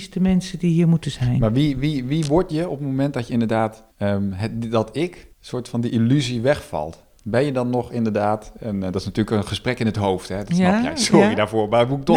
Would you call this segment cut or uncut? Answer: cut